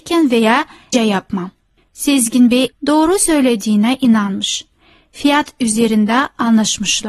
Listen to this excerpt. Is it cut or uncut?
cut